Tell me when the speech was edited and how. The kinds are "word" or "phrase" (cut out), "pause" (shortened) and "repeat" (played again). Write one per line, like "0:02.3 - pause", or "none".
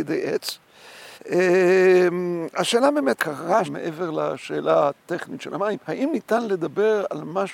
0:01.2 - pause
0:03.2 - word
0:03.6 - word
0:05.8 - pause